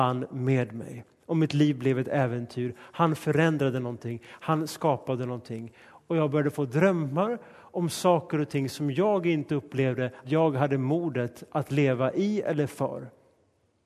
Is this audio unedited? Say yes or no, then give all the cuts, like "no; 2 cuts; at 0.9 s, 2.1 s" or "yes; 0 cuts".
no; 1 cut; at 10.2 s